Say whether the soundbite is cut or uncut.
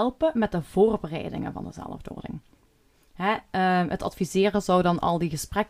uncut